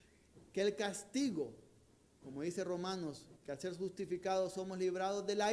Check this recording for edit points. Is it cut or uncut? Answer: cut